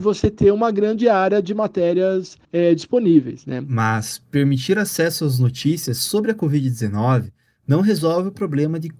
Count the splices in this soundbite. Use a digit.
1